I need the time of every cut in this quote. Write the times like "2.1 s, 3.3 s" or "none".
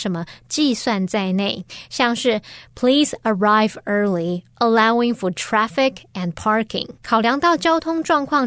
7.0 s